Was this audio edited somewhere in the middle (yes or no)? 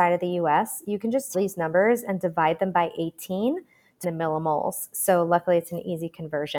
yes